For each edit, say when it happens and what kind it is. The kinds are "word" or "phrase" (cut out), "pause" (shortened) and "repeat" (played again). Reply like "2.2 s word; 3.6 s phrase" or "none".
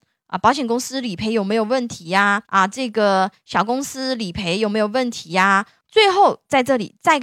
2.4 s pause